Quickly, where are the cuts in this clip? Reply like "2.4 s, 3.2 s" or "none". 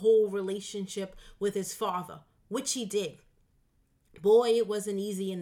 none